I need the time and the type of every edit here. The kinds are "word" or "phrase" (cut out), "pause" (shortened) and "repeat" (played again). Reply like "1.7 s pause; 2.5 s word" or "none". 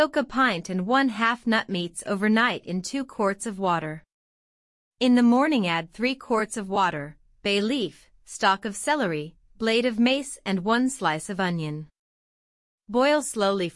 none